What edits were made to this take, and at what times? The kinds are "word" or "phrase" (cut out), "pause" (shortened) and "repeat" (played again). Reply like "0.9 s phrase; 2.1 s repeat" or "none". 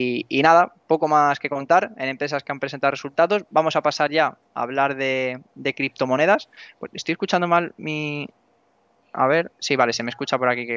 none